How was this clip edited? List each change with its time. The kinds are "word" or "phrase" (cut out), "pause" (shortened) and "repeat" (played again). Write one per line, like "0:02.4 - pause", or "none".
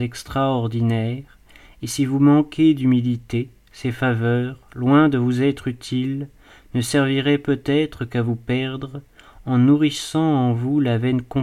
none